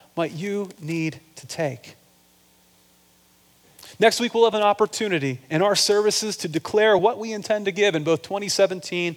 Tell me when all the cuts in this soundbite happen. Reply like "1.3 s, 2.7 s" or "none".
none